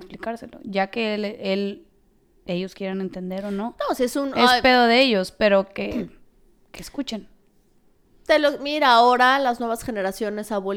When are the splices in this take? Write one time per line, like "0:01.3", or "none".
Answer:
none